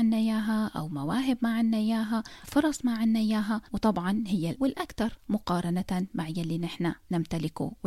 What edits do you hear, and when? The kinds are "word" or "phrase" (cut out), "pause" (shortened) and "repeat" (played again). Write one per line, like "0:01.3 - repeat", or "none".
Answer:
0:02.4 - word
0:03.7 - pause
0:04.5 - word